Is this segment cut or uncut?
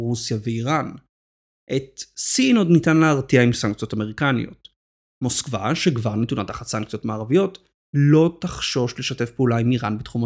uncut